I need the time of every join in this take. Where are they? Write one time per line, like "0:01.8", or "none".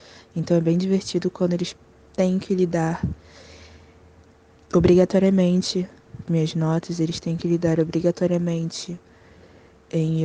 0:06.3